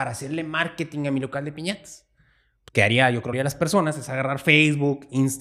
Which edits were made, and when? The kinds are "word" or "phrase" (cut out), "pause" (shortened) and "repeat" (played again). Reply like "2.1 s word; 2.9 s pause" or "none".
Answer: 2.7 s word; 3.3 s word